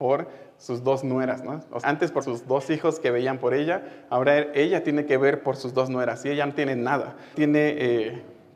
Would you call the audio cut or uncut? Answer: cut